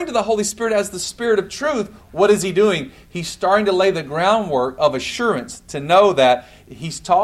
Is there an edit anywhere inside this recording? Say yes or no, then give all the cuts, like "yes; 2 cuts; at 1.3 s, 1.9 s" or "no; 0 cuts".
no; 0 cuts